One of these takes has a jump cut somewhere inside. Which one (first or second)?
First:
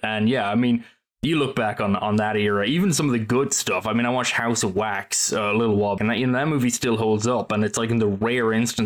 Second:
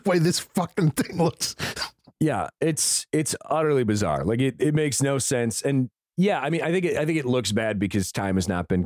first